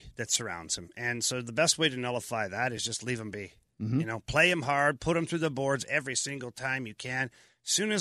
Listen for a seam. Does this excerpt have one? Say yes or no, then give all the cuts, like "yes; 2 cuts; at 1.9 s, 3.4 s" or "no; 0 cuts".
no; 0 cuts